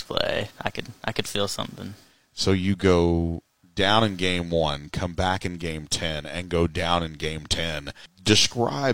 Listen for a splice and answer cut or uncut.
uncut